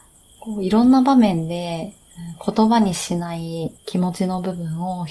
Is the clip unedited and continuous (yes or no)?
no